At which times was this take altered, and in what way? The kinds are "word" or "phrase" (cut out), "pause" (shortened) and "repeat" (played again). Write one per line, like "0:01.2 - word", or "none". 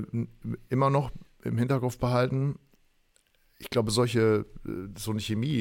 none